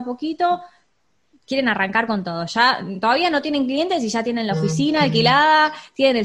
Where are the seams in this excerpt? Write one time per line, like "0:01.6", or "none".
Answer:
none

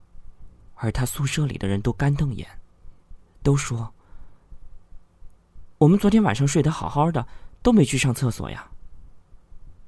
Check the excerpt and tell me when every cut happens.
none

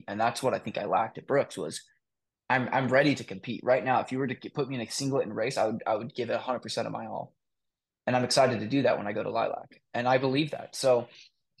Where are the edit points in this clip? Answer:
none

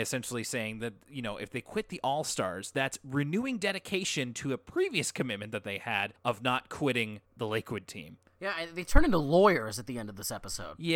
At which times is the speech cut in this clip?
0:06.2
0:07.3
0:08.3

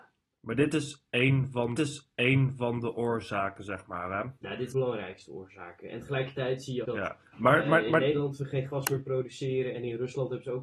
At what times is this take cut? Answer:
0:01.8
0:04.4
0:04.7
0:06.8

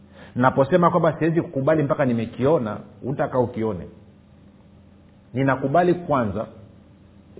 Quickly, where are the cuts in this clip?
none

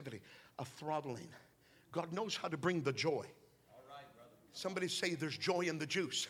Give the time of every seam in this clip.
none

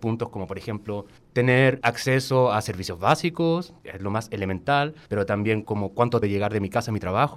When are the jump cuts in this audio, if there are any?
0:03.8
0:05.1
0:05.6
0:06.2

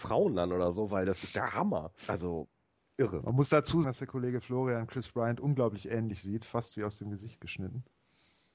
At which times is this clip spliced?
0:02.0
0:03.8

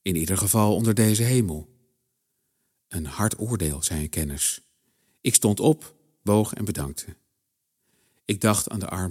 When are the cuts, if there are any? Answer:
none

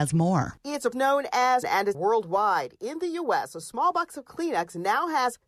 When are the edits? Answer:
0:00.9
0:01.6
0:01.9

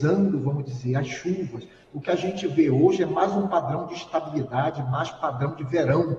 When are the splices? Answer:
none

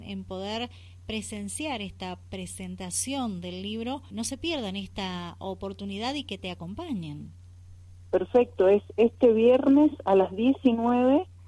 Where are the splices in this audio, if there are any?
0:04.1

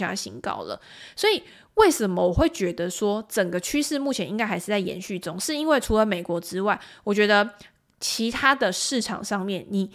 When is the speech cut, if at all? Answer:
none

